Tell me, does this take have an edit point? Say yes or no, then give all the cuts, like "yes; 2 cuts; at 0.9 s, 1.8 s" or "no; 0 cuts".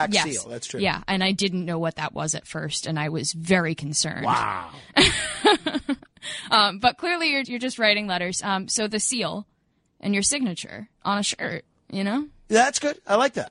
yes; 2 cuts; at 7.4 s, 11.0 s